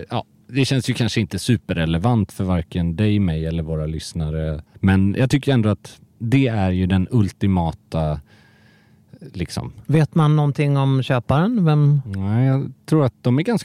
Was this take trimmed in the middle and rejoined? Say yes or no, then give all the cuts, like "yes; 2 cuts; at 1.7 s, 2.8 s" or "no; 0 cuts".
yes; 2 cuts; at 4.7 s, 6.1 s